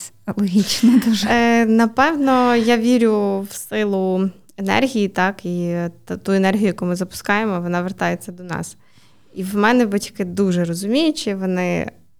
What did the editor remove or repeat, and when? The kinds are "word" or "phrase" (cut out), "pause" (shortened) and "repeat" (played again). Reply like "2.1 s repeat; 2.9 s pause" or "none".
none